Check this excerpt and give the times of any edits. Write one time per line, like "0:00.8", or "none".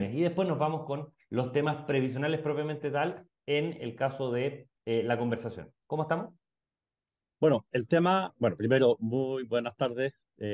none